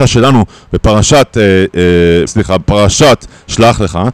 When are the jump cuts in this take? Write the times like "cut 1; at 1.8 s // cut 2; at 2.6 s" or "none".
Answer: cut 1; at 2.3 s

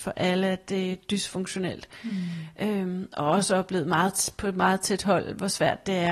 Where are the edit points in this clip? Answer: none

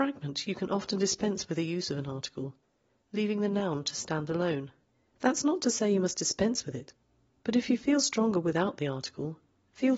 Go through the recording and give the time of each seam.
cut 1; at 4.8 s

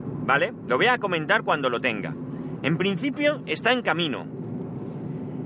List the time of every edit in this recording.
none

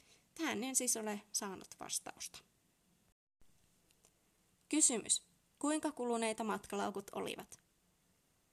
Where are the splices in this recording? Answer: none

